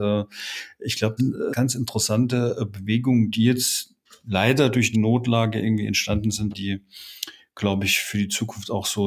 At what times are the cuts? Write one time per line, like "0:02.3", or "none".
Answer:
0:01.2
0:01.5
0:04.9
0:06.5